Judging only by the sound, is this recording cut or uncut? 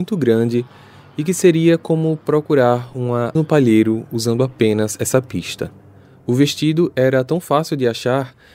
cut